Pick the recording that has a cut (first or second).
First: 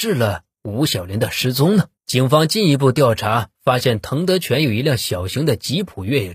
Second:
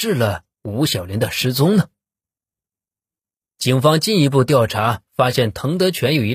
first